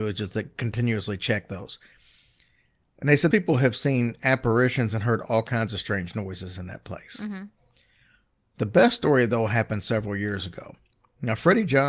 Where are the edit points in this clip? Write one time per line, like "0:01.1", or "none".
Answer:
0:03.3